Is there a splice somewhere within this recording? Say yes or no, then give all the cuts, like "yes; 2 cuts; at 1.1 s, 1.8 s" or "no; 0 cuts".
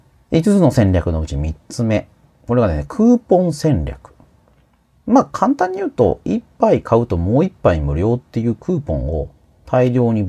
no; 0 cuts